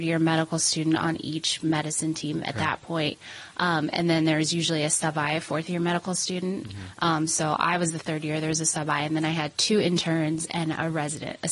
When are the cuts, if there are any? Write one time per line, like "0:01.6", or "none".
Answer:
none